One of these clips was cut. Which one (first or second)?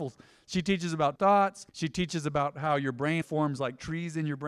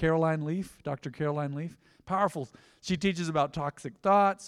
first